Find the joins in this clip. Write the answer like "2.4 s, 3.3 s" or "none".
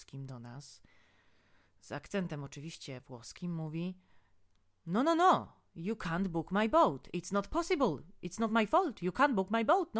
none